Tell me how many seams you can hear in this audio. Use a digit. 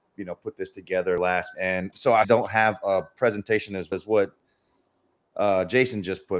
4